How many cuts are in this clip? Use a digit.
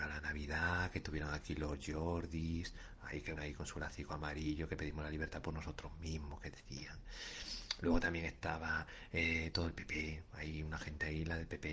1